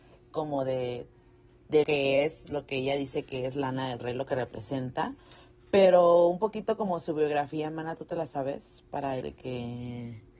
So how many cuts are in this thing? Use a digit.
2